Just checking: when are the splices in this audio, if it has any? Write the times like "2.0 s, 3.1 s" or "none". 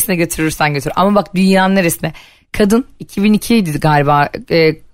none